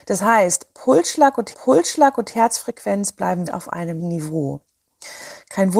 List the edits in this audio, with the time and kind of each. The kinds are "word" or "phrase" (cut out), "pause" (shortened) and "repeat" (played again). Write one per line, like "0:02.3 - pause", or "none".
0:01.5 - repeat
0:03.5 - word
0:04.0 - word